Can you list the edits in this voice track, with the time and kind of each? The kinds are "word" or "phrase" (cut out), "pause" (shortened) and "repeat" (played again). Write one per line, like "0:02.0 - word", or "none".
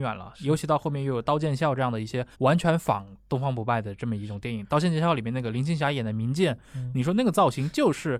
0:02.3 - pause

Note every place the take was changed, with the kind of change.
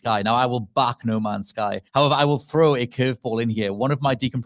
0:01.9 - pause

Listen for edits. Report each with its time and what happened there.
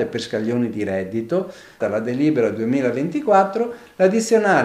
0:01.8 - phrase

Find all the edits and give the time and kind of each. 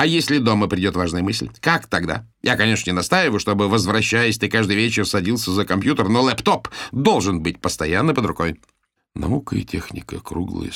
0:02.3 - pause
0:09.0 - pause

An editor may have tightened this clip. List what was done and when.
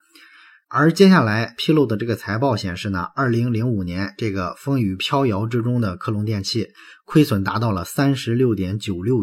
none

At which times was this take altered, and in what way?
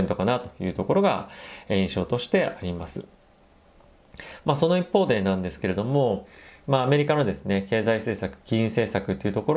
none

